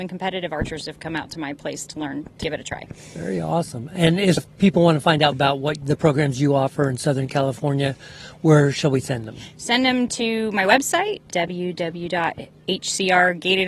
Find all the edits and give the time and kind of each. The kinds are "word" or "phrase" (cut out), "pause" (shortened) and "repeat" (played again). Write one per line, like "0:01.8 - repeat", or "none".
0:02.4 - word
0:04.4 - word
0:05.3 - word